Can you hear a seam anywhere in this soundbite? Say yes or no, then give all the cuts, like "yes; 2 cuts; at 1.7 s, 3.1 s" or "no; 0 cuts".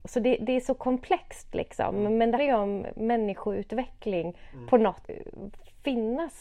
yes; 2 cuts; at 2.4 s, 5.0 s